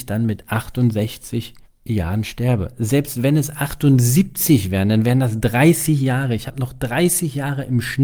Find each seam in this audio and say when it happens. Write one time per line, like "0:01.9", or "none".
0:01.7